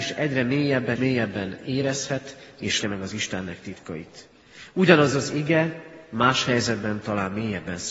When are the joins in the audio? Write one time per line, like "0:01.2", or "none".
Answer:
0:01.0
0:02.8